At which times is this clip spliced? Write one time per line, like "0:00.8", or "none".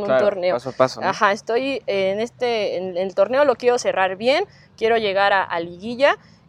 none